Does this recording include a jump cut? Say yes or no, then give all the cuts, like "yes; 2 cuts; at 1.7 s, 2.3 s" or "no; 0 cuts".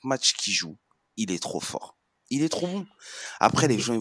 no; 0 cuts